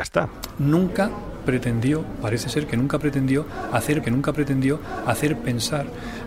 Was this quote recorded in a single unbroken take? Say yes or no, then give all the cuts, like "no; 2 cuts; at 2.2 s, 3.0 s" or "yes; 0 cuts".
no; 1 cut; at 4.0 s